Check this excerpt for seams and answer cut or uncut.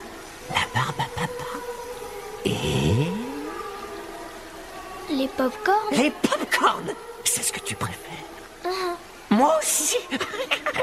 uncut